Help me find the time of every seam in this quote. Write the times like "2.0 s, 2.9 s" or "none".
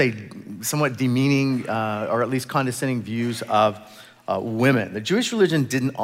none